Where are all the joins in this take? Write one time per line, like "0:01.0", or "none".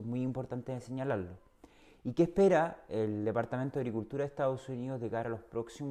none